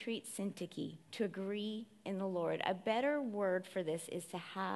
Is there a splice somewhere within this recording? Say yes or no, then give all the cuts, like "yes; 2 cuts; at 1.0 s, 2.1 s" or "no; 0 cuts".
yes; 1 cut; at 1.0 s